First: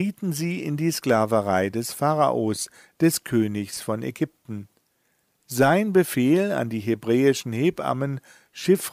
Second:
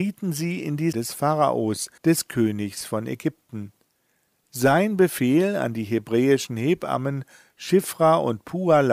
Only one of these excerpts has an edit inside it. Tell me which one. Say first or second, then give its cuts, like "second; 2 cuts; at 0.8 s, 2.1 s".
second; 2 cuts; at 0.9 s, 2.0 s